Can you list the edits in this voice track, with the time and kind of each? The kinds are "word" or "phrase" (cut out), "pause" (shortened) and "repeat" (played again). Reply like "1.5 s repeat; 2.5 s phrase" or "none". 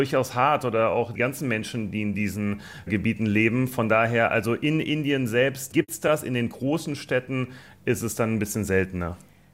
none